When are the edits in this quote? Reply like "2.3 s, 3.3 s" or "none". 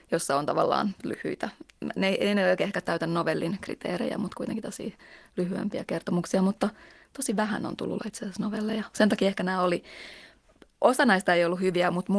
8.0 s